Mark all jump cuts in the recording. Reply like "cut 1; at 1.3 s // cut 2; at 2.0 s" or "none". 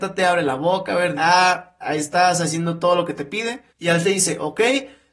cut 1; at 1.2 s // cut 2; at 1.8 s // cut 3; at 3.7 s // cut 4; at 4.0 s